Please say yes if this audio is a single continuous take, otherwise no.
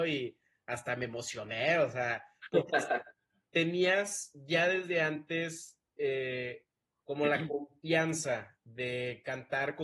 yes